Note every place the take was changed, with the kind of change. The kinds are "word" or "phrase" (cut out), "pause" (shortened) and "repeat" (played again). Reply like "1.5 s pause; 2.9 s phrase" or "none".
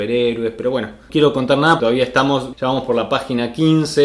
1.1 s word; 1.8 s word; 2.5 s word